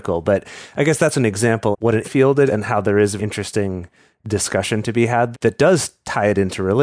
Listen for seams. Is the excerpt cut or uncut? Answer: cut